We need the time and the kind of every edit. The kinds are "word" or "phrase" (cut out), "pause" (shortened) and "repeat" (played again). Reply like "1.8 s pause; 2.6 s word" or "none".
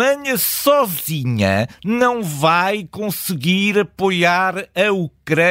none